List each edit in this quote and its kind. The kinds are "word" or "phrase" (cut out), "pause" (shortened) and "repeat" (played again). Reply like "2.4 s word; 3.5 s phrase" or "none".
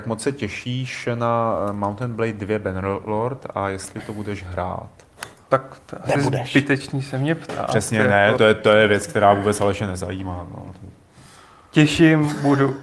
8.4 s word